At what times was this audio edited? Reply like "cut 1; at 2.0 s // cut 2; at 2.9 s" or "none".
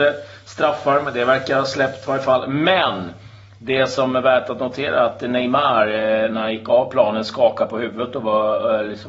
none